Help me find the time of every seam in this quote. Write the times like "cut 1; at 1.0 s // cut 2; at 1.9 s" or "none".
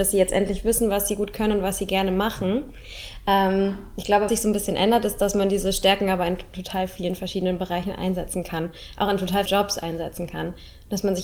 cut 1; at 4.3 s // cut 2; at 9.5 s